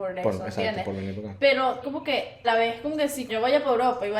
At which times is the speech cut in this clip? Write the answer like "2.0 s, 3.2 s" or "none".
1.8 s, 2.4 s, 3.3 s